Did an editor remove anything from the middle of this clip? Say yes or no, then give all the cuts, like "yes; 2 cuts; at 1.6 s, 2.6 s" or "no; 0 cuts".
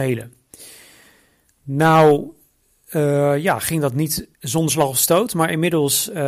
yes; 1 cut; at 4.3 s